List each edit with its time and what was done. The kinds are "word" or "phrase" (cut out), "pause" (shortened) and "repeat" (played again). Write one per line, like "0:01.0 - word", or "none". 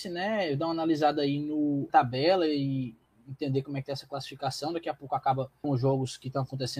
0:01.9 - word
0:05.6 - word